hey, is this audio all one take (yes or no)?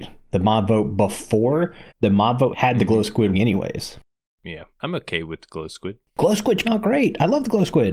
no